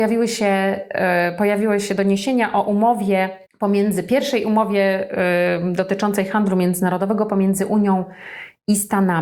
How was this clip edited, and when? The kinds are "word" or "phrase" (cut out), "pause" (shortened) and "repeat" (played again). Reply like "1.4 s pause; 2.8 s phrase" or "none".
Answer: 3.5 s pause